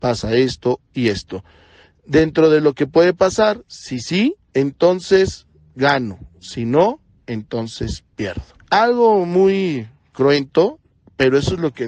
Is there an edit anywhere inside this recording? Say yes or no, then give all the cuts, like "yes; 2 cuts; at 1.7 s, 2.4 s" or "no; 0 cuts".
yes; 3 cuts; at 4.5 s, 6.4 s, 8.5 s